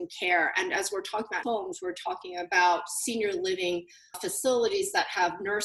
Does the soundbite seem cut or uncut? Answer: cut